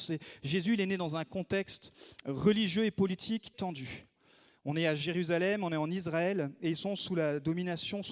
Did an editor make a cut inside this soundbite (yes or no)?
yes